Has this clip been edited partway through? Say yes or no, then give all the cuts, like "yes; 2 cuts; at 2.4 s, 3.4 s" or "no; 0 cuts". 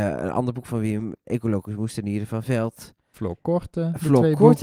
yes; 1 cut; at 1.2 s